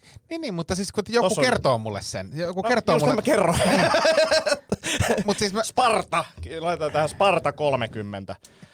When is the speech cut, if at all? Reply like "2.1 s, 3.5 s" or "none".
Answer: none

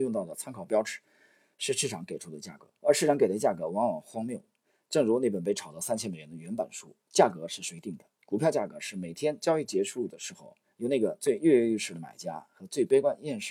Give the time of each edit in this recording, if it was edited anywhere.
2.8 s, 8.1 s

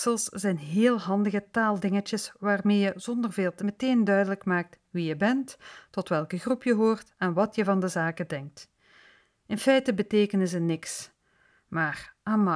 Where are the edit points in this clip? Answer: 3.6 s

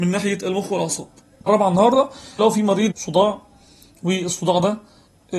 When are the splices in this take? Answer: 1.5 s, 2.4 s, 2.9 s

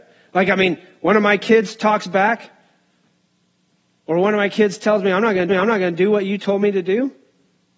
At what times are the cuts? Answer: 5.5 s

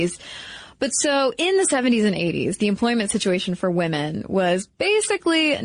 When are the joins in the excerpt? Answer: none

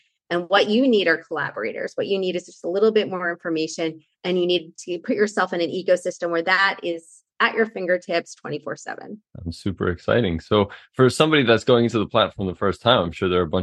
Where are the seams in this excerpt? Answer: 9.3 s

